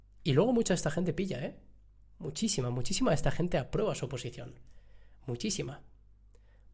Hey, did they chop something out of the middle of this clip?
no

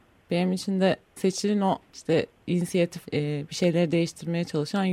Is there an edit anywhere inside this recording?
yes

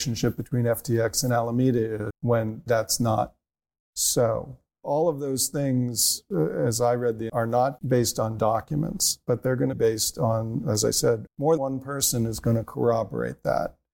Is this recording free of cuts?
no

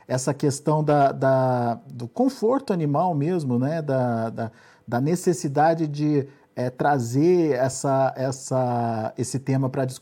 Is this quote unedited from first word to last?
yes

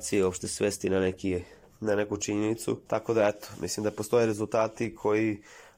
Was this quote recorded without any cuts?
no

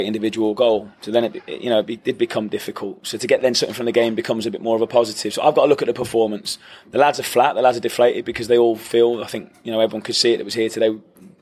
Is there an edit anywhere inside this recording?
yes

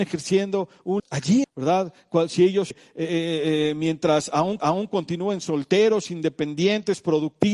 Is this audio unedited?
no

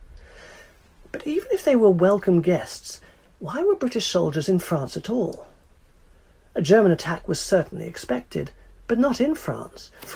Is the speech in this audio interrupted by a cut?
no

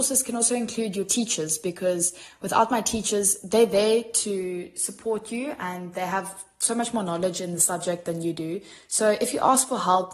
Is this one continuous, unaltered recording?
yes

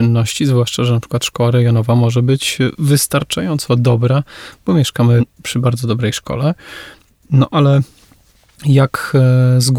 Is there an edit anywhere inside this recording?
no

